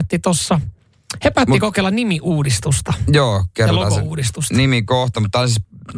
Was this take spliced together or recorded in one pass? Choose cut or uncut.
uncut